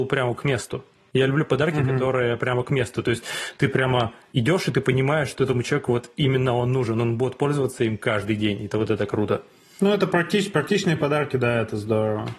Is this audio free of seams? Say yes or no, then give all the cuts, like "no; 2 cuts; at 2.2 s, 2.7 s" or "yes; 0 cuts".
yes; 0 cuts